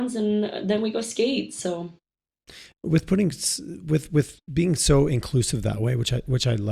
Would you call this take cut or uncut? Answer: uncut